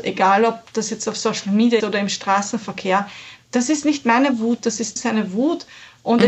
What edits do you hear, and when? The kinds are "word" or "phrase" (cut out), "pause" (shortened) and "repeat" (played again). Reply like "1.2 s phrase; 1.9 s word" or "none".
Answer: 1.8 s word; 5.0 s word